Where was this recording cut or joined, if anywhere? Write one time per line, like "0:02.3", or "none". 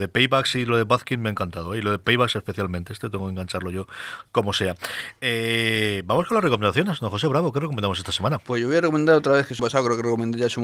0:09.6